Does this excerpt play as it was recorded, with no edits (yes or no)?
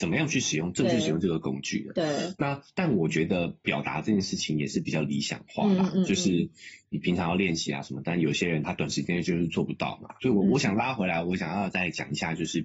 no